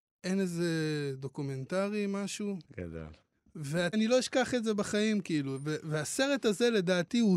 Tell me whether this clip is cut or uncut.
cut